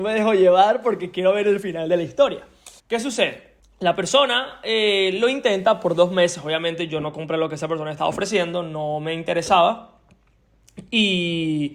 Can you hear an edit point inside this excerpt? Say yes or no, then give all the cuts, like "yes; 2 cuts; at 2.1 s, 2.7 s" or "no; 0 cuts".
yes; 2 cuts; at 2.8 s, 3.6 s